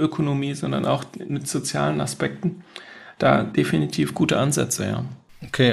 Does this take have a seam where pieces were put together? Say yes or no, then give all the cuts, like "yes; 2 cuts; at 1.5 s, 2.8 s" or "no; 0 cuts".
no; 0 cuts